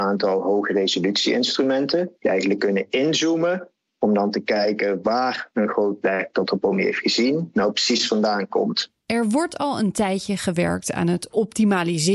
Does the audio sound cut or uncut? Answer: cut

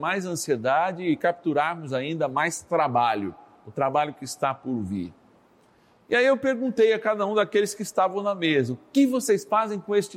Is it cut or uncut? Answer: uncut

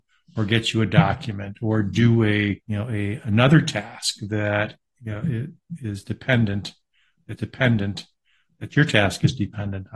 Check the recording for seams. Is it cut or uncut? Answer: cut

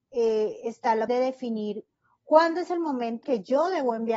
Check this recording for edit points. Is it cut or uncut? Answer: cut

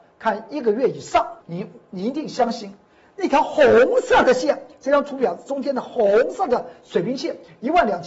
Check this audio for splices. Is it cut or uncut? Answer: cut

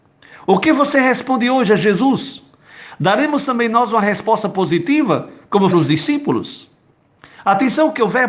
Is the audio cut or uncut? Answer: cut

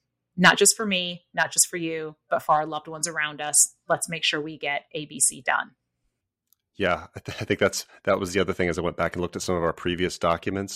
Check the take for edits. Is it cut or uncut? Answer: uncut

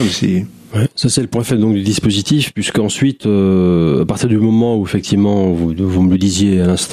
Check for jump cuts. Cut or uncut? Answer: uncut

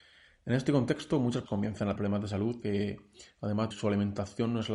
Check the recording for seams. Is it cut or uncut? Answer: cut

